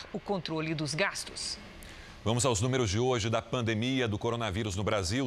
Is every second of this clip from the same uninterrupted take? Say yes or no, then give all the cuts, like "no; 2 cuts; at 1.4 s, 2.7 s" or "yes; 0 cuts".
yes; 0 cuts